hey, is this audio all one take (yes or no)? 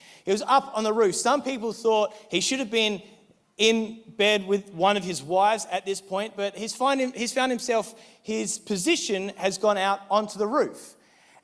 yes